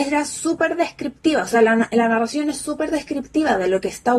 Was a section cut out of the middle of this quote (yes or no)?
no